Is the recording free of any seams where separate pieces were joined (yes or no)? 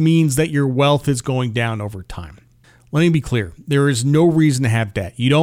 no